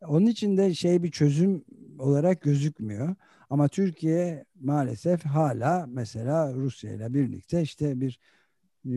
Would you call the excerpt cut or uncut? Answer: uncut